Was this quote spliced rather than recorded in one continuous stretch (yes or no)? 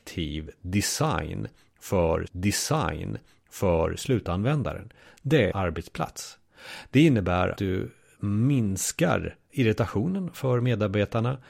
yes